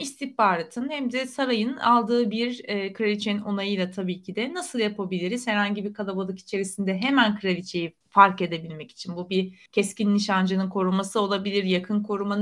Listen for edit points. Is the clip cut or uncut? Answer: cut